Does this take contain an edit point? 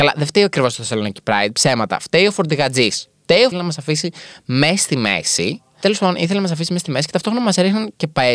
yes; 1 cut; at 3.5 s

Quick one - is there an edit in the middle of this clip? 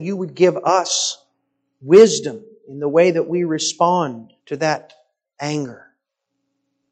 yes; 1 cut; at 4.4 s

